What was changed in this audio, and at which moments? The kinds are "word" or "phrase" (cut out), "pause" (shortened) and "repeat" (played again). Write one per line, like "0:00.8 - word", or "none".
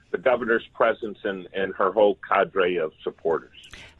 none